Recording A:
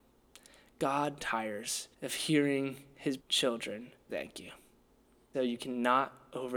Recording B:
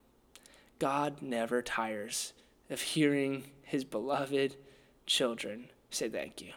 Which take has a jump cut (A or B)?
A